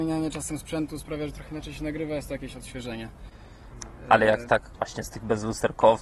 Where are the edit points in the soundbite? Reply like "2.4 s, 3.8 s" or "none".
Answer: 4.7 s